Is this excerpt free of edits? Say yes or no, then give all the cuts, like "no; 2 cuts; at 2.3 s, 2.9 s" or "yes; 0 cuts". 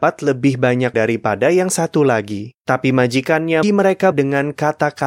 no; 4 cuts; at 0.9 s, 2.6 s, 3.6 s, 4.1 s